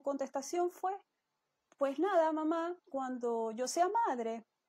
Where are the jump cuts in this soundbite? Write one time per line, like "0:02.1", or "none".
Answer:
none